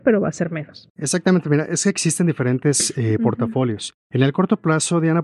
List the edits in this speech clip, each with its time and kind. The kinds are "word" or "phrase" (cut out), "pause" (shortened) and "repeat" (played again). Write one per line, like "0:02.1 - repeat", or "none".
none